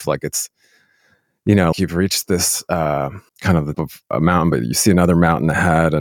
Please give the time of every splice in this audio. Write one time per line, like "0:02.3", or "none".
0:01.7
0:03.3
0:03.7